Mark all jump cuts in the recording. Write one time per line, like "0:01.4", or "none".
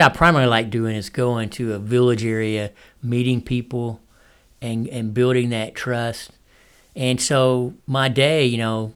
0:07.8